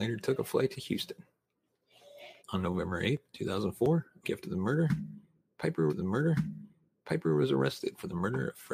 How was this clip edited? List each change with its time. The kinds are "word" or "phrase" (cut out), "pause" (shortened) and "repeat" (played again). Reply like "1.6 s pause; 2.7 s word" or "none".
2.4 s pause; 4.2 s word; 5.9 s repeat